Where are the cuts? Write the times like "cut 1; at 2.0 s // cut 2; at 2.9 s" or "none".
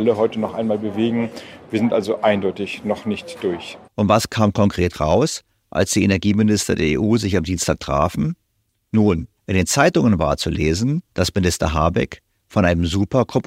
cut 1; at 3.9 s // cut 2; at 9.4 s // cut 3; at 11.1 s

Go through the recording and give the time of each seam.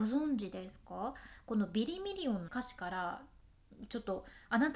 cut 1; at 2.5 s

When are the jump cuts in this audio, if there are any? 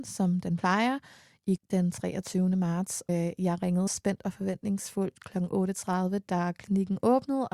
cut 1; at 1.6 s // cut 2; at 3.1 s // cut 3; at 3.9 s

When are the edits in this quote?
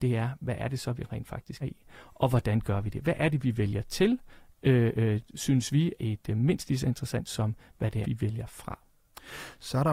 cut 1; at 1.6 s // cut 2; at 6.0 s // cut 3; at 7.3 s // cut 4; at 8.0 s

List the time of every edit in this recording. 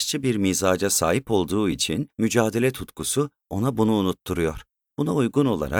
none

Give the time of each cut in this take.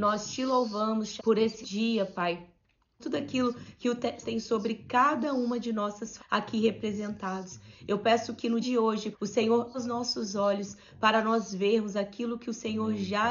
cut 1; at 1.2 s // cut 2; at 1.6 s // cut 3; at 3.0 s // cut 4; at 4.2 s // cut 5; at 6.2 s // cut 6; at 8.6 s // cut 7; at 9.1 s // cut 8; at 9.7 s

